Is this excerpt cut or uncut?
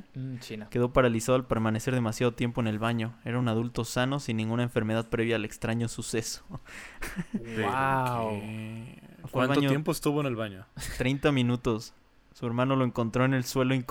uncut